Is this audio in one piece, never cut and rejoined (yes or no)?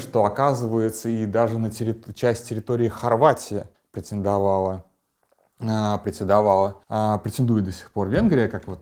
no